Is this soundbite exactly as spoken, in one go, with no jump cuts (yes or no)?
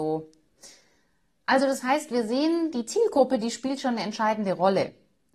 yes